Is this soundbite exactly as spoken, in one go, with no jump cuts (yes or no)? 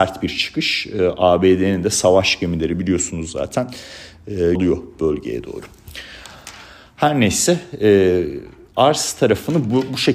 no